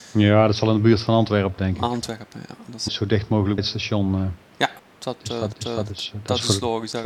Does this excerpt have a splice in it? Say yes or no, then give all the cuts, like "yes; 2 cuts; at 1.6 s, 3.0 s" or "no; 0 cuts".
yes; 5 cuts; at 1.6 s, 2.9 s, 3.6 s, 4.8 s, 5.5 s